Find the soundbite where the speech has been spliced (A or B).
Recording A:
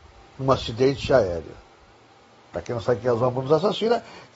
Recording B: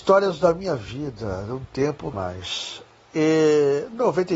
B